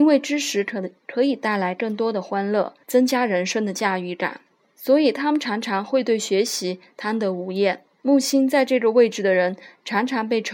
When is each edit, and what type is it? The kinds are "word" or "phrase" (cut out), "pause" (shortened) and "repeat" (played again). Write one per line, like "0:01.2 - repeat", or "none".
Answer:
0:02.8 - pause
0:04.6 - pause
0:07.9 - pause